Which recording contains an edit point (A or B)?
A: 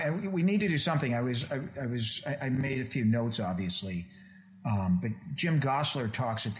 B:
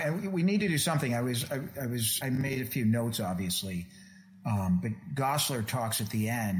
B